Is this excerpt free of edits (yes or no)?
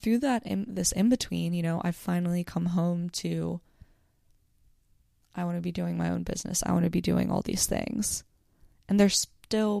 yes